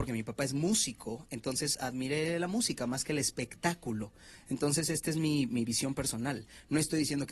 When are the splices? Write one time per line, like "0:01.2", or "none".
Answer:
none